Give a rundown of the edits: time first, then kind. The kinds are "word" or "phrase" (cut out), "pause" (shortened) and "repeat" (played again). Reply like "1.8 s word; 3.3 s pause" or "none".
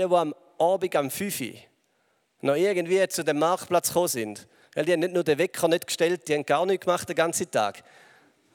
none